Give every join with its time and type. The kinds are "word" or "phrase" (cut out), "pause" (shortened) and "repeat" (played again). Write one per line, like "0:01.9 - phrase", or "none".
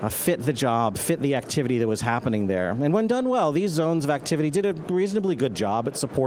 none